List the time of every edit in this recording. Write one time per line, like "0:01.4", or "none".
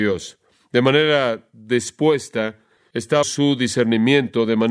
0:03.2